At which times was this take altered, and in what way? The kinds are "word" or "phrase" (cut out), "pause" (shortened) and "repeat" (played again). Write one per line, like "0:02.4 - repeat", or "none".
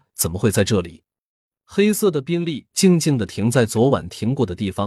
0:01.4 - pause